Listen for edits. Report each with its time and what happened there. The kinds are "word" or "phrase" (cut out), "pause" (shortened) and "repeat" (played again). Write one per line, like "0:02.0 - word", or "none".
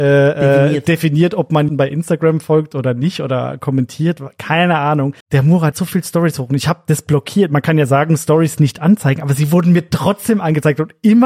0:01.7 - word
0:05.2 - pause
0:05.7 - word